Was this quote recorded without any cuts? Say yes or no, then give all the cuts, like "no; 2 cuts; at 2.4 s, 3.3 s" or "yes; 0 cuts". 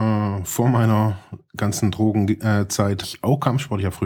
no; 1 cut; at 3.0 s